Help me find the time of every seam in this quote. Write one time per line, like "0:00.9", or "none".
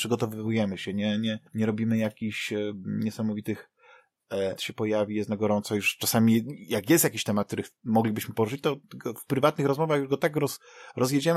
0:01.5
0:04.6

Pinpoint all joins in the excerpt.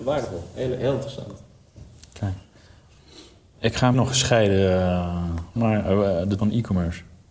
0:03.9
0:05.6
0:06.4

